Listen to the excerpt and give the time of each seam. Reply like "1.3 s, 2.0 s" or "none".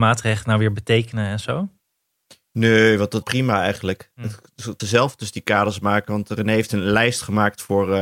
3.2 s, 4.8 s